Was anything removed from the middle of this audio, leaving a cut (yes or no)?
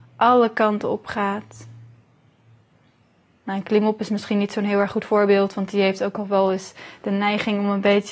no